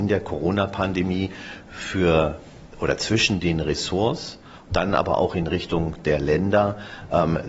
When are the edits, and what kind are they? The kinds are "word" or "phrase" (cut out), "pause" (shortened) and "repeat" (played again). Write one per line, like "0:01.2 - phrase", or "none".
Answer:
0:04.7 - word